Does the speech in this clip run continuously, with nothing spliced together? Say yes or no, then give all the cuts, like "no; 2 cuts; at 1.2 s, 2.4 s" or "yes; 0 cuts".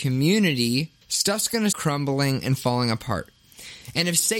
no; 2 cuts; at 1.0 s, 1.7 s